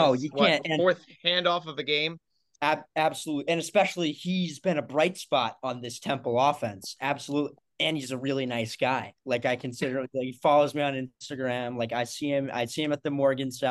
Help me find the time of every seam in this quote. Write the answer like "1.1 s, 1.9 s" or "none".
none